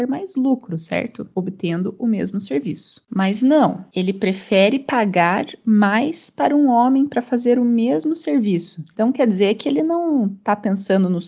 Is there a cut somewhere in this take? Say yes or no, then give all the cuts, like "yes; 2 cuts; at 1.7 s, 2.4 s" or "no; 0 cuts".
no; 0 cuts